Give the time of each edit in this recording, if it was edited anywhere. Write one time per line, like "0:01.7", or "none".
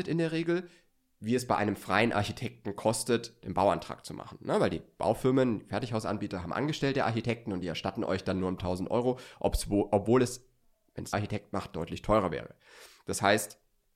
0:08.6
0:11.1